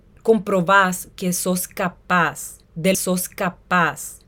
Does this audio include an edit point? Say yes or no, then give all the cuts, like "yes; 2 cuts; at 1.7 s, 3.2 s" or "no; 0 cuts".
yes; 1 cut; at 2.9 s